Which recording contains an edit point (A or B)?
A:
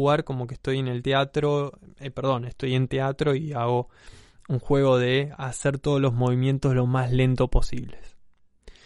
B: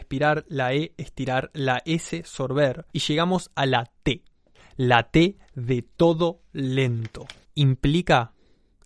B